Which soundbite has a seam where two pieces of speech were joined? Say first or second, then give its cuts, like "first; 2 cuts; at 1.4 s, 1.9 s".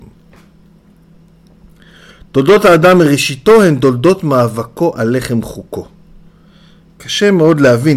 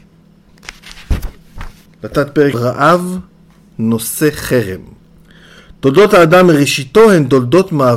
second; 3 cuts; at 1.9 s, 2.5 s, 5.2 s